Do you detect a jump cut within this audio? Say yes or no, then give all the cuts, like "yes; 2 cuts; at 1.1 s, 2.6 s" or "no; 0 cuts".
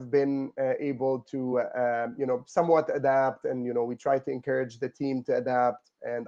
no; 0 cuts